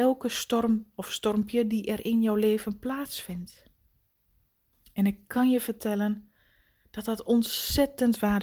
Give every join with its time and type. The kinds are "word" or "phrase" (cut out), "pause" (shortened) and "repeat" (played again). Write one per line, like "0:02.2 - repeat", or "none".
none